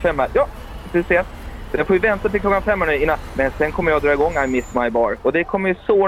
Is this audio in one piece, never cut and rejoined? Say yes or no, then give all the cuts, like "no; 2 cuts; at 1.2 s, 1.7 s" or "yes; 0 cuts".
yes; 0 cuts